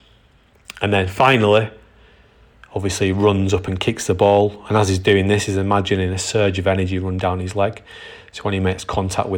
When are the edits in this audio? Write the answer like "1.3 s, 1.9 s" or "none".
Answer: none